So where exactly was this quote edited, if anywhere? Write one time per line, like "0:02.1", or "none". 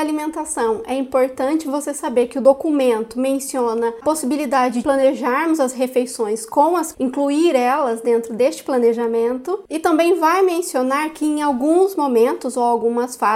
0:04.0
0:04.8
0:06.9